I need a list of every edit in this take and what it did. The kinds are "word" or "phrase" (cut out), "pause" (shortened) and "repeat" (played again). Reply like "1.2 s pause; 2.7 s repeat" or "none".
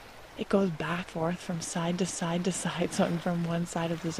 1.1 s word; 2.1 s repeat; 3.2 s word